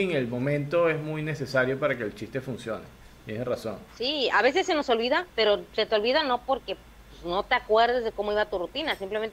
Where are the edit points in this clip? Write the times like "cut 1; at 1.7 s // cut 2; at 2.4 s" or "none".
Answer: cut 1; at 3.9 s // cut 2; at 5.3 s